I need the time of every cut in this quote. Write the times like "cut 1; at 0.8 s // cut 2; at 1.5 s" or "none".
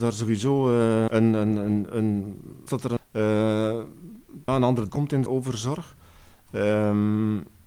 cut 1; at 1.1 s // cut 2; at 2.7 s // cut 3; at 3.0 s // cut 4; at 4.5 s // cut 5; at 4.9 s // cut 6; at 5.3 s